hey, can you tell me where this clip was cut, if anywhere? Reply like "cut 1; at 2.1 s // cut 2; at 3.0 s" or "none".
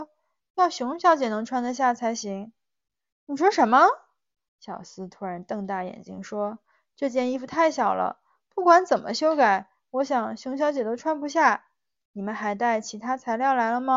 none